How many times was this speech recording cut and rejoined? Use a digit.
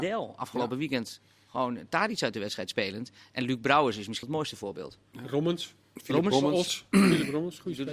1